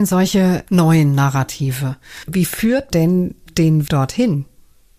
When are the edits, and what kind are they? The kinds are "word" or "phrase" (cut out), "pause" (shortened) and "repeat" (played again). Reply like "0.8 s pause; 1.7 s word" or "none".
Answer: 2.9 s word; 3.9 s word